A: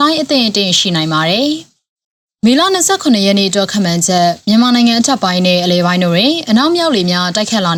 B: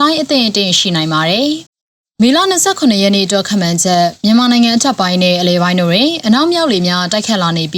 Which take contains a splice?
B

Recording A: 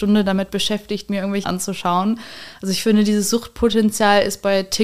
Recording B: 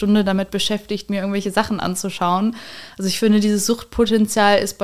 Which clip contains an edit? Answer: A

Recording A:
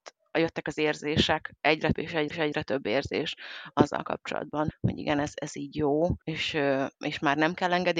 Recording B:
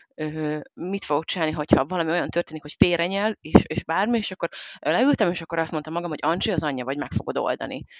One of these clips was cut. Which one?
A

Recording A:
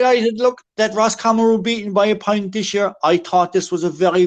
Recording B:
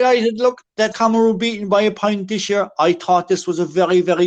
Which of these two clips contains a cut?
B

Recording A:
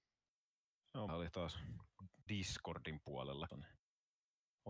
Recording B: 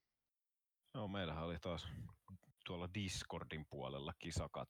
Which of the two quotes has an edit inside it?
A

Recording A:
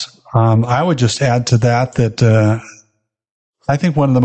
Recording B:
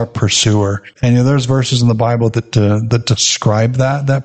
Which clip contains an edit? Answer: B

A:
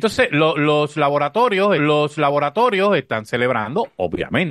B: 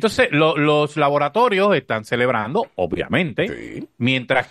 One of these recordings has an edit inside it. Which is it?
A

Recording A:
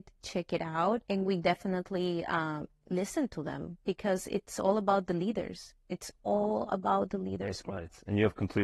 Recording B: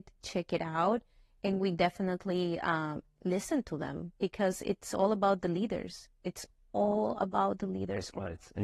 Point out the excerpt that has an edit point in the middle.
A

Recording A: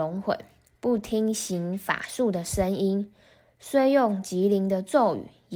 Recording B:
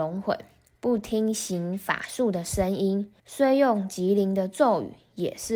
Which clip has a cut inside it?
B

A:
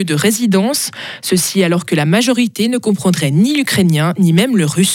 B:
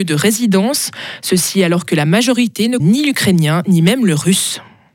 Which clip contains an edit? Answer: B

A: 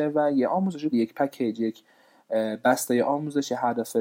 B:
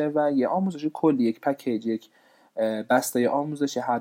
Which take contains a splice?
A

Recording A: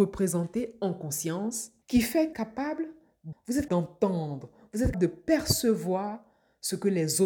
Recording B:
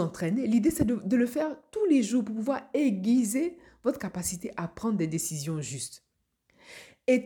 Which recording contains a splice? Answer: A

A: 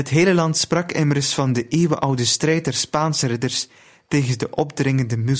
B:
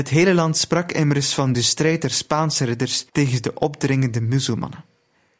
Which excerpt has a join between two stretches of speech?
B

